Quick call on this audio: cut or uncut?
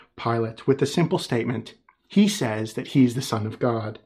uncut